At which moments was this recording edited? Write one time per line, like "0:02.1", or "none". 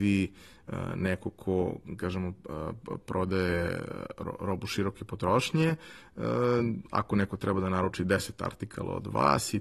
none